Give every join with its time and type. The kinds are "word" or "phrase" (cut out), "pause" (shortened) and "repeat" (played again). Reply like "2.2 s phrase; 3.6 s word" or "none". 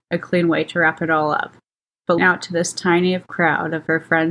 2.2 s word